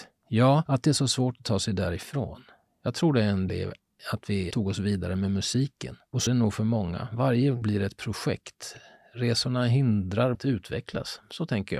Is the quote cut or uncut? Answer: cut